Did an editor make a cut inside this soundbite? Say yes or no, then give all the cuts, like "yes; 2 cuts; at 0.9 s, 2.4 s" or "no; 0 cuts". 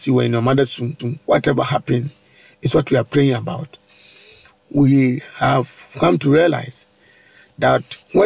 yes; 1 cut; at 1.0 s